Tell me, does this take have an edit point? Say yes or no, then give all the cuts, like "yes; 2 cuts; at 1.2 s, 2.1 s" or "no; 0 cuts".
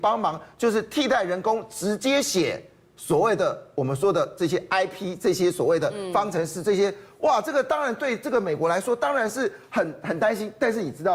no; 0 cuts